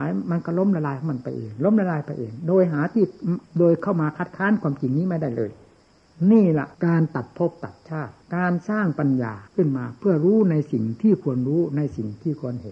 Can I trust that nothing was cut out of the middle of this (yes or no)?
no